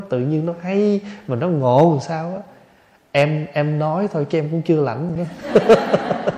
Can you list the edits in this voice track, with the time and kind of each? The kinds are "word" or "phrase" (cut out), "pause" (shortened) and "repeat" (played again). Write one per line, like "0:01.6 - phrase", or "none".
none